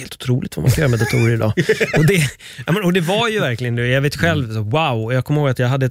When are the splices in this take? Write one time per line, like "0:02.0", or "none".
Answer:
none